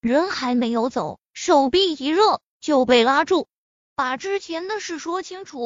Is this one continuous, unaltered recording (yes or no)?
no